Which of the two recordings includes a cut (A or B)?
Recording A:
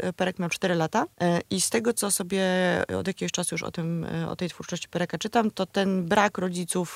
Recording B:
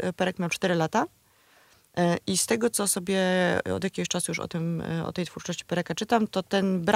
A